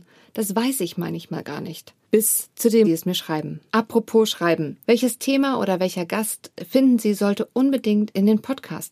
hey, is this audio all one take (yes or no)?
no